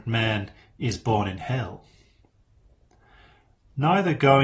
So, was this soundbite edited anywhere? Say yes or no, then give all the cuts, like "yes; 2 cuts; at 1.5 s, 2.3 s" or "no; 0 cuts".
no; 0 cuts